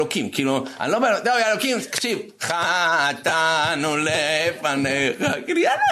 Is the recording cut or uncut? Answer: uncut